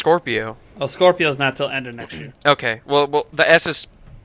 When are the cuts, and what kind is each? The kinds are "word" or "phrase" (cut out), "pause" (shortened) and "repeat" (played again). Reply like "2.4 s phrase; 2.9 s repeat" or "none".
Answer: 2.4 s pause